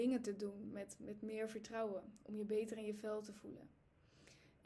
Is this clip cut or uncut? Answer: uncut